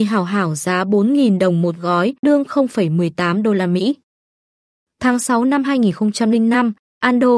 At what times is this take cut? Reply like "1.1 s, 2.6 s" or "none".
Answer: 2.2 s